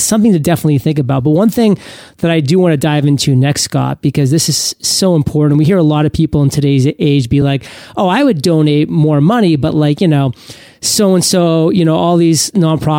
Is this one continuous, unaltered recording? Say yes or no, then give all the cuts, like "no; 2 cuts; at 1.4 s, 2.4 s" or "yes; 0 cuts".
yes; 0 cuts